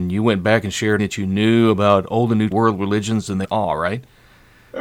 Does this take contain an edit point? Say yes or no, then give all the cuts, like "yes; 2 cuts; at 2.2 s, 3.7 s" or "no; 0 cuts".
yes; 3 cuts; at 1.0 s, 2.5 s, 3.4 s